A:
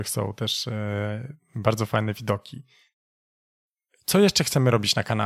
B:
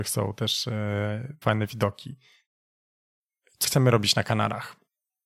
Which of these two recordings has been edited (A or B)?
B